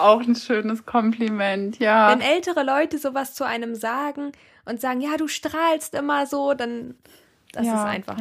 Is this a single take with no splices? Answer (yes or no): yes